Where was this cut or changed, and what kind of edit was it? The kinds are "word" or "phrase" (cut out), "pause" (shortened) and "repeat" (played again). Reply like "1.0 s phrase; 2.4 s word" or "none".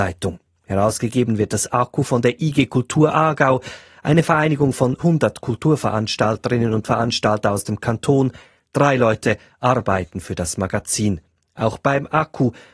5.0 s word